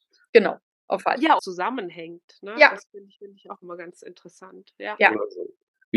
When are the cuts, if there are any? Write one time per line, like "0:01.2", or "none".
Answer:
0:01.0
0:01.4
0:03.2